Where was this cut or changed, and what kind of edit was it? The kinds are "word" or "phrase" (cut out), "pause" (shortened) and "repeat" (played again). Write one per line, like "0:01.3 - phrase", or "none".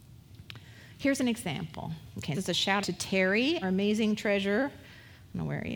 0:02.3 - word
0:02.8 - word
0:03.6 - word